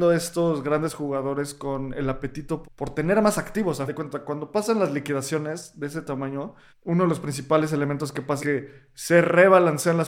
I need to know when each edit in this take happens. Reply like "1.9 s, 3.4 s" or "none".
2.6 s, 3.9 s, 6.7 s, 8.4 s